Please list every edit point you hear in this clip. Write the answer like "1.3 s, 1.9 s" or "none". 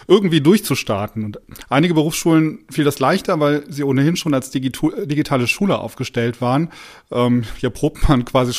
none